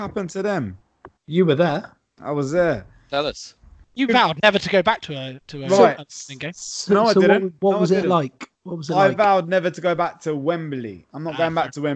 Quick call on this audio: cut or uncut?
cut